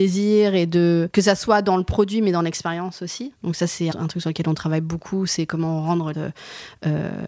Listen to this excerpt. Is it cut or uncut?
cut